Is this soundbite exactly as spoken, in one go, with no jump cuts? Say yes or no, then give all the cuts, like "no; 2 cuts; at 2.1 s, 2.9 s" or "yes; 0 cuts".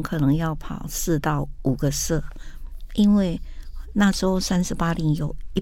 yes; 0 cuts